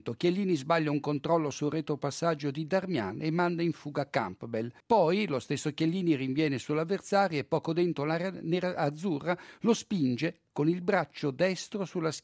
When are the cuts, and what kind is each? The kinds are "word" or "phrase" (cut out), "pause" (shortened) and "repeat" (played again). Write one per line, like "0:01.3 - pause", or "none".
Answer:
0:04.8 - pause